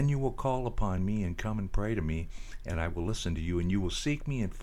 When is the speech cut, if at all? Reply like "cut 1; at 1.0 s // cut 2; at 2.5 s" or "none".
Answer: none